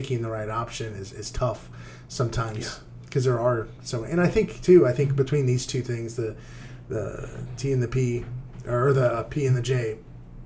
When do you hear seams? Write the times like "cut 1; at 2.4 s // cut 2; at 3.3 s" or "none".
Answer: none

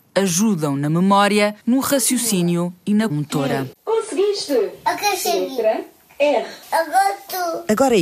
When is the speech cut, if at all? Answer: cut 1; at 1.6 s // cut 2; at 3.1 s

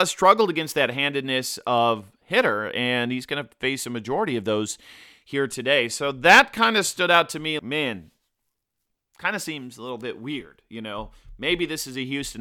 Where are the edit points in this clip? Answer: cut 1; at 7.6 s

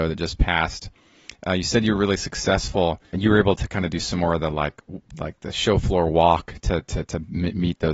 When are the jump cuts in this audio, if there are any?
cut 1; at 3.1 s // cut 2; at 5.1 s

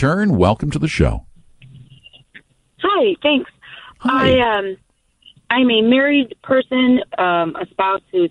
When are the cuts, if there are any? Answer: cut 1; at 7.1 s

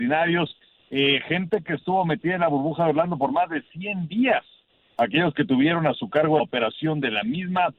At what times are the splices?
cut 1; at 6.4 s

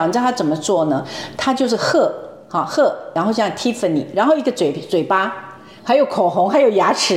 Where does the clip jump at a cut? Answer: none

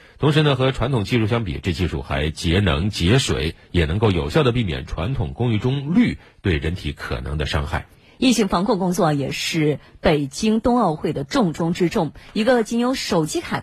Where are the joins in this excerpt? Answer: none

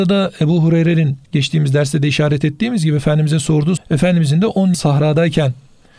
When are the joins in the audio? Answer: cut 1; at 1.2 s // cut 2; at 3.8 s // cut 3; at 4.7 s

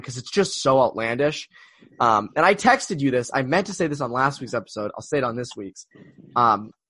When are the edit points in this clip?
none

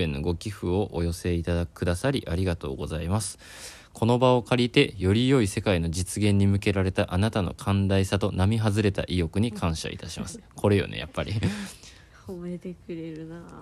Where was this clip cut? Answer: none

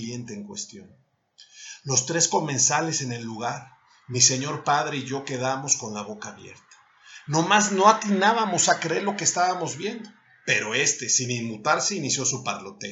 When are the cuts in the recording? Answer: none

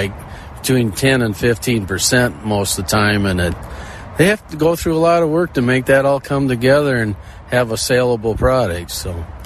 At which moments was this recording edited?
none

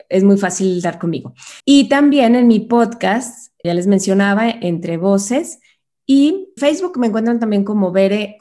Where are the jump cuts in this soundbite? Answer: cut 1; at 1.6 s // cut 2; at 3.6 s // cut 3; at 6.6 s

